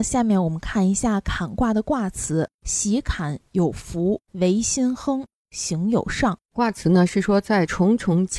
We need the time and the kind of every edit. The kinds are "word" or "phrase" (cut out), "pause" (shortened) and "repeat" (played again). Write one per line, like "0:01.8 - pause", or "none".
0:02.5 - pause
0:04.2 - pause
0:06.4 - pause

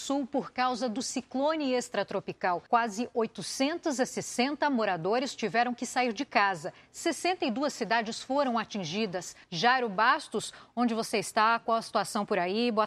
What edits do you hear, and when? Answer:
0:02.7 - pause
0:09.4 - pause

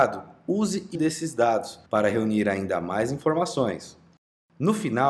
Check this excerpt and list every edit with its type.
0:00.9 - word
0:01.9 - pause

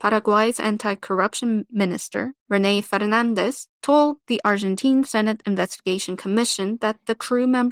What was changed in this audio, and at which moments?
none

